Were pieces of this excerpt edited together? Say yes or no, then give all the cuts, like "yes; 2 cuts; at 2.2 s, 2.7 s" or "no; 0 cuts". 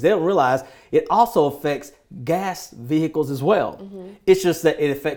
no; 0 cuts